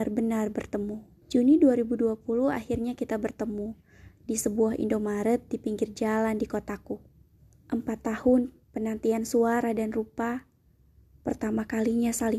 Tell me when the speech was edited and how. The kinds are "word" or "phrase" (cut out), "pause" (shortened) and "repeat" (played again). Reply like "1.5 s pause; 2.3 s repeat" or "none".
1.2 s pause; 7.4 s pause; 8.6 s pause